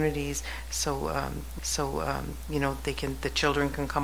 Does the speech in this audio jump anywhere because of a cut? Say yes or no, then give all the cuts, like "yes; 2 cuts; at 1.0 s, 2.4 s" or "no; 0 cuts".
yes; 1 cut; at 1.6 s